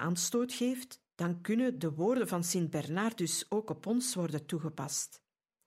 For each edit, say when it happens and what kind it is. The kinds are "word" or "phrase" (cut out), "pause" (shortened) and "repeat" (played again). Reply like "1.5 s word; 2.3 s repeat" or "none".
1.1 s pause

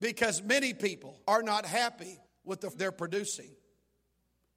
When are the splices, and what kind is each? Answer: 1.2 s pause; 2.2 s pause; 2.7 s word

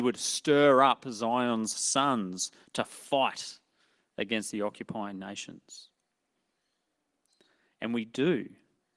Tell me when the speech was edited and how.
none

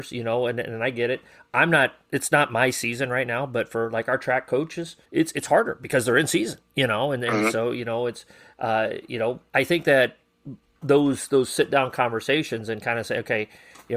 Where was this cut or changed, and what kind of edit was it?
5.1 s pause; 9.5 s word

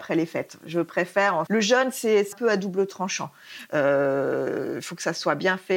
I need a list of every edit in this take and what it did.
1.5 s word; 2.3 s word

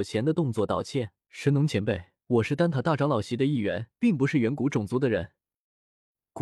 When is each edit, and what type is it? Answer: 1.2 s pause; 2.2 s pause; 3.9 s pause

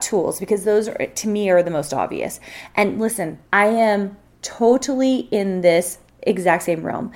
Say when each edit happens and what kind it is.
3.5 s pause

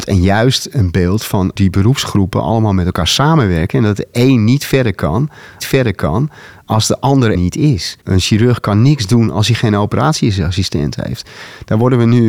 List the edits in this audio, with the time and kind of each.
1.6 s word; 5.6 s repeat; 7.3 s word; 8.0 s pause

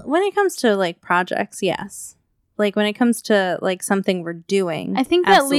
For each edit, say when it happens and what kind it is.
none

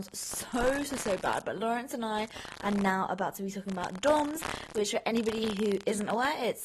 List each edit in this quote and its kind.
none

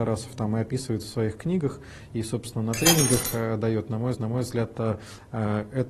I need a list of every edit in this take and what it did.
4.1 s repeat

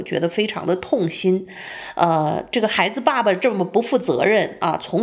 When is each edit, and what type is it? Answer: none

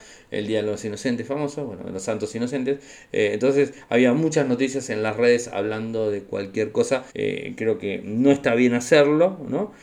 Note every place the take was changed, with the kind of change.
7.1 s pause

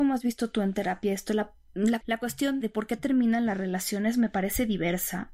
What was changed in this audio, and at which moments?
2.6 s word

